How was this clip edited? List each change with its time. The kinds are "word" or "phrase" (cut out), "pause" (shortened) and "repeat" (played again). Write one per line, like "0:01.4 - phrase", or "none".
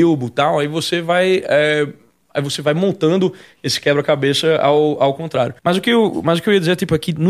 0:05.6 - pause